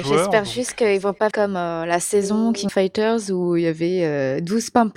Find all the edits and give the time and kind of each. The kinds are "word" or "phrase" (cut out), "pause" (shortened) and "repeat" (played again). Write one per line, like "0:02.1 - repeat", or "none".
0:01.3 - word
0:02.7 - word